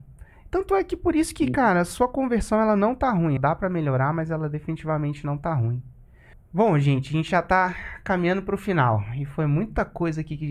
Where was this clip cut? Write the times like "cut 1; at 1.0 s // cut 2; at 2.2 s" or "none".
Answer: cut 1; at 3.4 s // cut 2; at 6.3 s

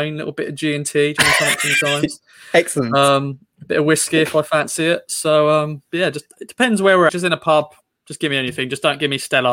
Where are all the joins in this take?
cut 1; at 7.1 s

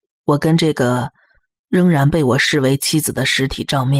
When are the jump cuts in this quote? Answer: none

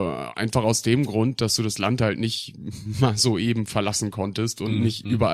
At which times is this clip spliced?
none

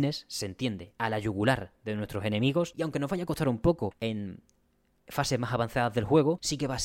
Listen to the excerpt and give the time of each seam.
none

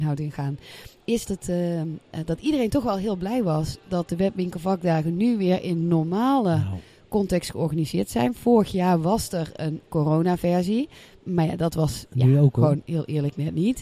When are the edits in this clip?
cut 1; at 1.2 s

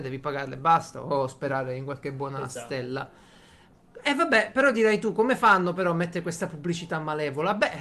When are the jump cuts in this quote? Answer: none

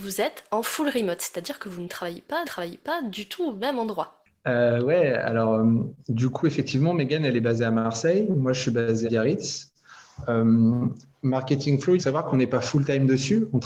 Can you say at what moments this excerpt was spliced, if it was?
cut 1; at 2.4 s // cut 2; at 6.0 s // cut 3; at 9.0 s // cut 4; at 12.0 s

